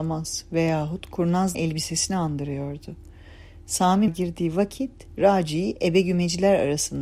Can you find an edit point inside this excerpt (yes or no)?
yes